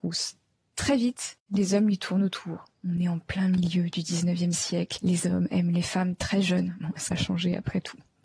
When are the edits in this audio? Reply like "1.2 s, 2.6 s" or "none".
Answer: 7.1 s